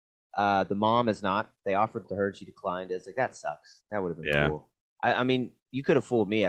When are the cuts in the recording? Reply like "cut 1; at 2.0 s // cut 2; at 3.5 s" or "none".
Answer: cut 1; at 2.0 s // cut 2; at 4.8 s